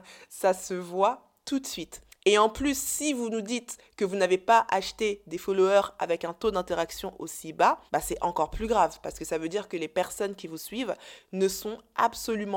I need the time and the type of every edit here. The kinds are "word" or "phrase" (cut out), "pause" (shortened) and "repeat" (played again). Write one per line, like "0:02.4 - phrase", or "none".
0:02.1 - pause
0:07.9 - pause